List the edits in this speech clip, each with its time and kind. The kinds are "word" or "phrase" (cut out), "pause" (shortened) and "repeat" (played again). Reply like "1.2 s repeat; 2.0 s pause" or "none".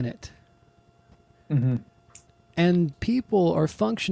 2.9 s word